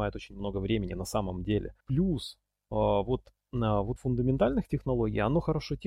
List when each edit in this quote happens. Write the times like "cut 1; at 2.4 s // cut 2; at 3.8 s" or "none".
cut 1; at 1.8 s // cut 2; at 4.0 s

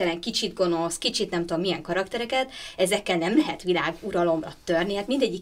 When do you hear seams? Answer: none

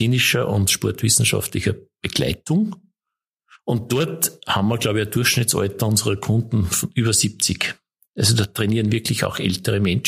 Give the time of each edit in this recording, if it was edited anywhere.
none

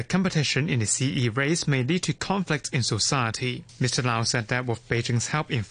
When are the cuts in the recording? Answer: none

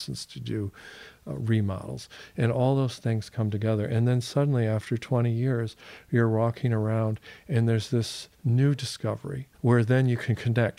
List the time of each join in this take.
cut 1; at 8.3 s // cut 2; at 9.5 s

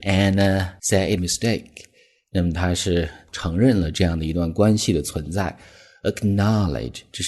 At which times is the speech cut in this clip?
cut 1; at 1.2 s

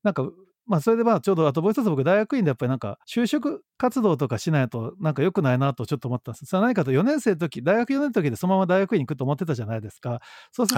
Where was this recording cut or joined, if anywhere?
cut 1; at 3.0 s // cut 2; at 3.7 s

